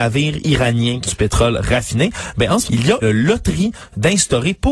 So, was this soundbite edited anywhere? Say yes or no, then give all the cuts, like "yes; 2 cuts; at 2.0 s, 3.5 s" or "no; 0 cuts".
yes; 3 cuts; at 1.1 s, 2.7 s, 3.0 s